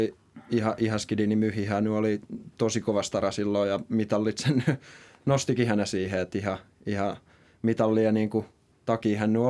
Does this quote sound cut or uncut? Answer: uncut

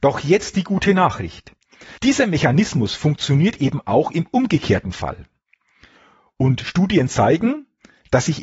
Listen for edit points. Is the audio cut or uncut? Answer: cut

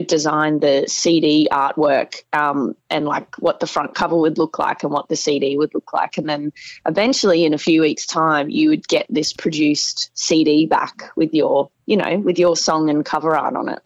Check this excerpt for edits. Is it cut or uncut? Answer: uncut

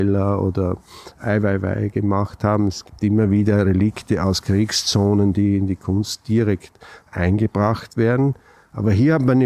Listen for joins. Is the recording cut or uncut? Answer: uncut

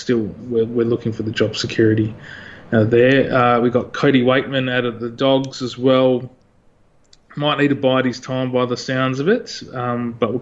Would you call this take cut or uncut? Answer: uncut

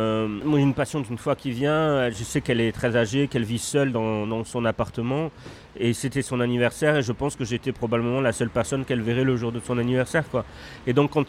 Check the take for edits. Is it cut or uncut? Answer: uncut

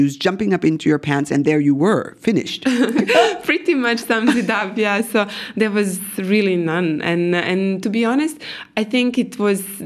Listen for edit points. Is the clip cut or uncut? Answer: uncut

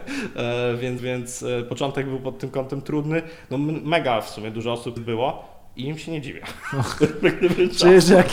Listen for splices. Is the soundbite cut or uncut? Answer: cut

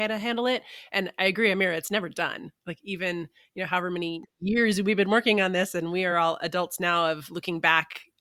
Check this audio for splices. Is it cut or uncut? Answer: uncut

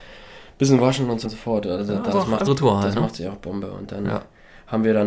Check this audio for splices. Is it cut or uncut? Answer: cut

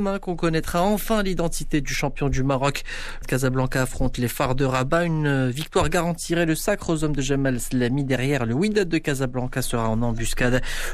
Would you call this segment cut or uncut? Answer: cut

